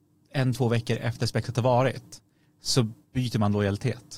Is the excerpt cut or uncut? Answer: uncut